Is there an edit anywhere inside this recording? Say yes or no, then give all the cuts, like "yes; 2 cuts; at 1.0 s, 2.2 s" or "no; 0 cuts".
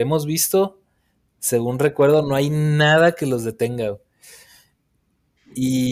no; 0 cuts